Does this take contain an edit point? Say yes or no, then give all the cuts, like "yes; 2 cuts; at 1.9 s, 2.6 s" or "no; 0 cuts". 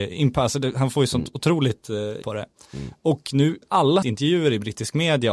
yes; 3 cuts; at 2.2 s, 3.6 s, 4.0 s